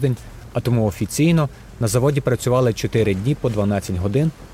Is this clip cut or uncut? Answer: uncut